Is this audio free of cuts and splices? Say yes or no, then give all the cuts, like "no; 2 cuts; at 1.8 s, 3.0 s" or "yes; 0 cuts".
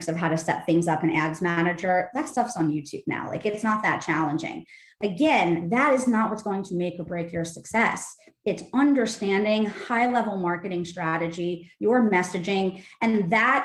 no; 1 cut; at 3.6 s